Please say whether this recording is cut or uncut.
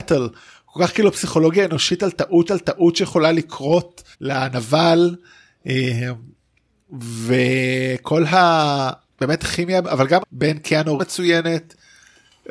cut